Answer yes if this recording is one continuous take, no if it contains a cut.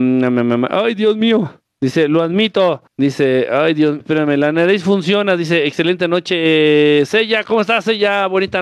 no